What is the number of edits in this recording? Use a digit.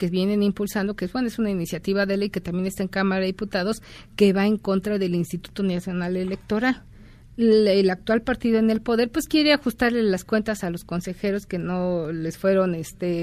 0